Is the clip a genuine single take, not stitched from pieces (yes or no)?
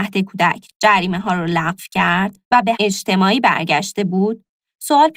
no